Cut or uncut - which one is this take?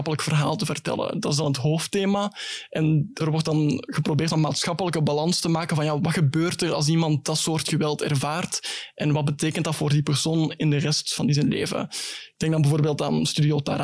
cut